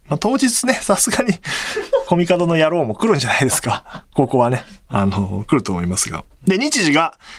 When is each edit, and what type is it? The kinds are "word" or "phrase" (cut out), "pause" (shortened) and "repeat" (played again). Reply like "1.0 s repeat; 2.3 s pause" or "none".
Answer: 2.1 s phrase

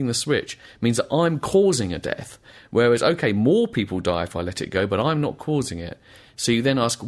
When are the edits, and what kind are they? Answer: none

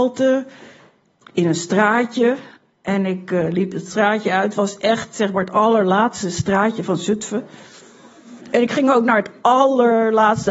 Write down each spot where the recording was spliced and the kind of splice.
2.6 s pause; 8.4 s pause

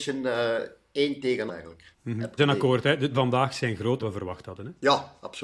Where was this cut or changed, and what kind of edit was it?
1.5 s word; 1.9 s pause; 2.4 s word; 3.1 s word; 4.0 s word

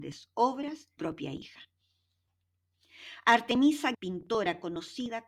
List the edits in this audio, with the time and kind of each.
1.0 s phrase; 3.9 s word

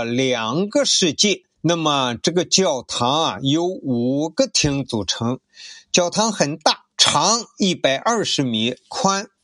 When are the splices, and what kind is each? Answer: 1.6 s pause; 6.9 s pause

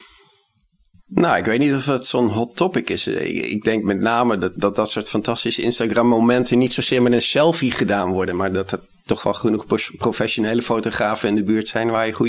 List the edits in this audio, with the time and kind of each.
none

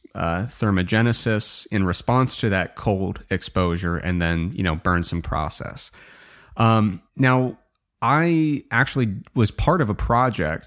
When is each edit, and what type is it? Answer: 5.2 s phrase; 7.1 s pause

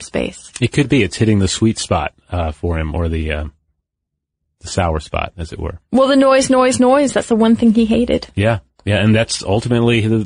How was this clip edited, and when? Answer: none

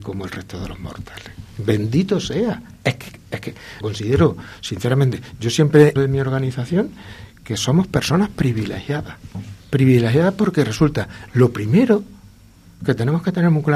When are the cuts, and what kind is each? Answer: 3.8 s word; 6.0 s phrase; 9.6 s pause

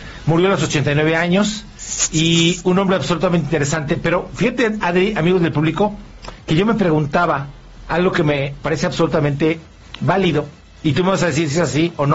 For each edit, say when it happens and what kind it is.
none

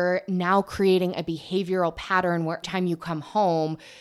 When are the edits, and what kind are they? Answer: 2.6 s word

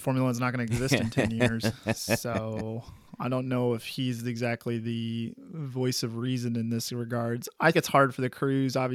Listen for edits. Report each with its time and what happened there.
7.7 s word

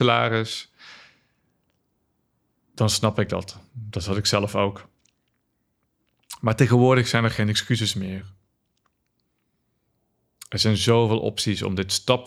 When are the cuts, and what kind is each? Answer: none

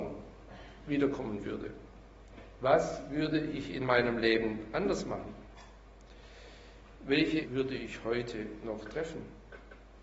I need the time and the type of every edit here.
7.4 s word

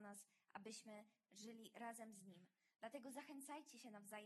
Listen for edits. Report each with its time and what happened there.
1.2 s phrase

